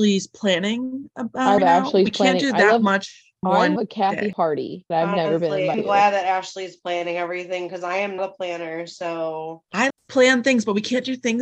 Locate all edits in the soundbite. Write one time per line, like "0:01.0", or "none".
0:01.6
0:03.4
0:03.8
0:04.9
0:05.7
0:08.2
0:09.9